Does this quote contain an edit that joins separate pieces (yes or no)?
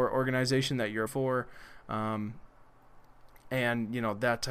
yes